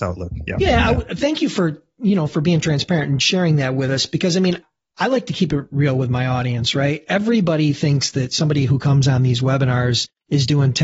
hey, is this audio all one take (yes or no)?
yes